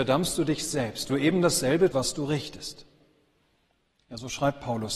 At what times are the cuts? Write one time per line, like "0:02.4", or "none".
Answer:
0:01.1
0:01.9